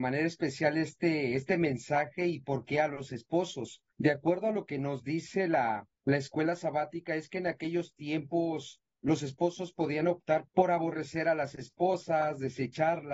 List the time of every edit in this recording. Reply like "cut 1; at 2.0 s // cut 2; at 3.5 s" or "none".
cut 1; at 3.9 s // cut 2; at 6.0 s // cut 3; at 10.5 s